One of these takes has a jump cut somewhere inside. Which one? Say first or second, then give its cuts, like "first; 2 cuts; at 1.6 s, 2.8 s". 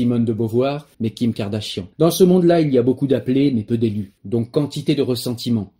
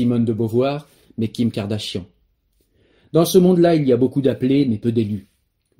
first; 3 cuts; at 0.9 s, 1.9 s, 4.2 s